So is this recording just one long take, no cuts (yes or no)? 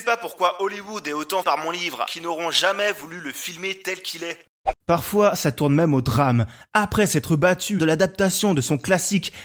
no